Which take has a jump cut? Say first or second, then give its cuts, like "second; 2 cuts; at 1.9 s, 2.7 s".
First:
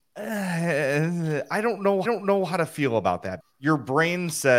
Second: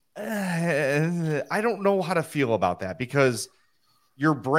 first; 2 cuts; at 2.0 s, 3.4 s